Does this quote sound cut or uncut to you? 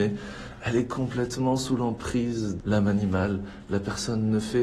cut